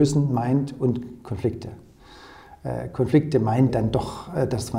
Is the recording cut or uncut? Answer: cut